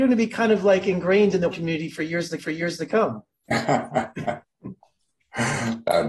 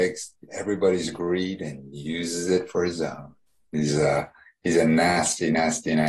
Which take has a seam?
first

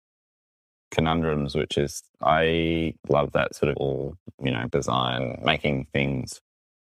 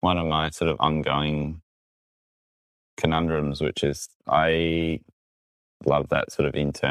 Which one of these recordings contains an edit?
first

